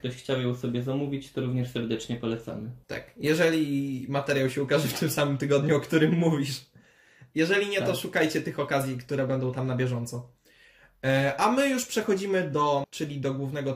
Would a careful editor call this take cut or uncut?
cut